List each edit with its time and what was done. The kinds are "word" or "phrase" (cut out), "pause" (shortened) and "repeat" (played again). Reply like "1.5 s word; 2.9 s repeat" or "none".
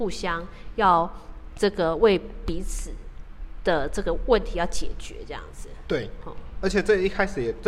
none